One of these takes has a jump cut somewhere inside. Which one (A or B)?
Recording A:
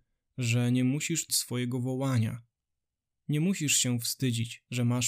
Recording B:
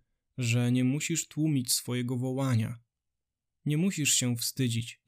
A